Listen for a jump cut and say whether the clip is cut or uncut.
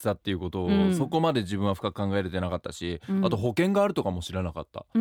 uncut